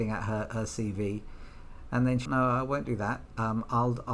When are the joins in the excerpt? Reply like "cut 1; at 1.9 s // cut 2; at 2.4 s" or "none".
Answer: cut 1; at 2.3 s